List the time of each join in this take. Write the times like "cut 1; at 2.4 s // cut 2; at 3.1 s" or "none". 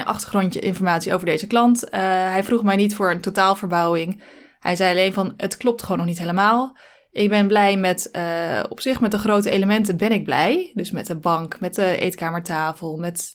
none